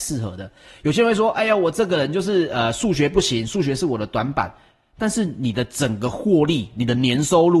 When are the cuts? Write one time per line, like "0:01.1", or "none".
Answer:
none